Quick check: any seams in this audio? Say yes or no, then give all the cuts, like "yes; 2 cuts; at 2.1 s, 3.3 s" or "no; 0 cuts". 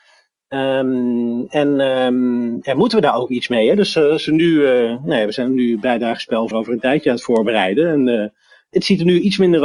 yes; 1 cut; at 6.5 s